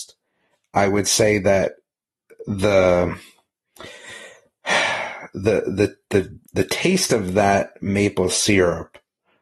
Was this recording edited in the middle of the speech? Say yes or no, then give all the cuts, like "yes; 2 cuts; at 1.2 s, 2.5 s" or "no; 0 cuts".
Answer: yes; 1 cut; at 6.4 s